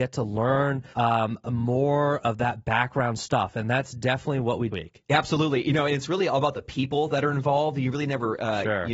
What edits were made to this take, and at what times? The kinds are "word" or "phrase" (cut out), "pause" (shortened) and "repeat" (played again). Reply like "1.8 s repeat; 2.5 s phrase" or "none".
0.9 s pause; 4.7 s phrase